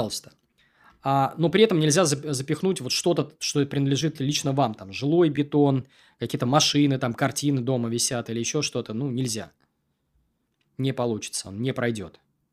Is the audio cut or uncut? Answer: uncut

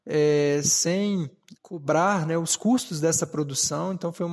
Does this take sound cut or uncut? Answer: cut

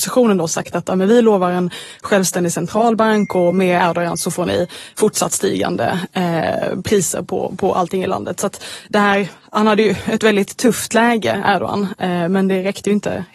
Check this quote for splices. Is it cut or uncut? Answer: uncut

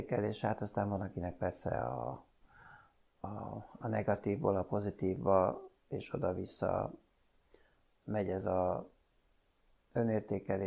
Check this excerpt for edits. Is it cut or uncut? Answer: uncut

